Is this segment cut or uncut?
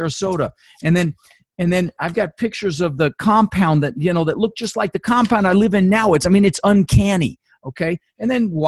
uncut